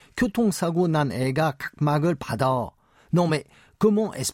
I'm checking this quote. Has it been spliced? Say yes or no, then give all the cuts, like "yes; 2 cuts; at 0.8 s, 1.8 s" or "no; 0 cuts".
no; 0 cuts